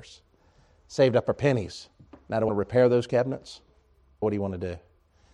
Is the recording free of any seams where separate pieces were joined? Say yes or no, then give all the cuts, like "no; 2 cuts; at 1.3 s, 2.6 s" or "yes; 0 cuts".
no; 3 cuts; at 2.1 s, 2.5 s, 4.2 s